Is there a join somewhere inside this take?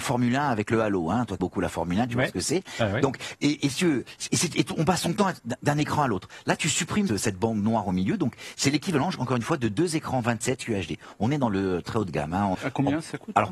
yes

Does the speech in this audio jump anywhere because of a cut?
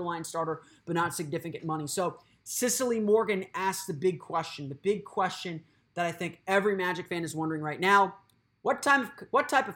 no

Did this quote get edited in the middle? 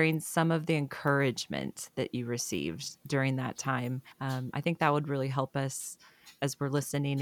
yes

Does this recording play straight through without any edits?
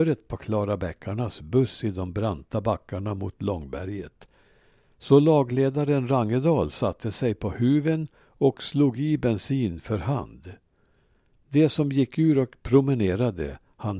yes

